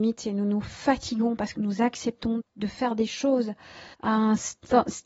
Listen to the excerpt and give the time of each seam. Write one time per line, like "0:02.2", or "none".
0:01.5
0:02.4
0:03.9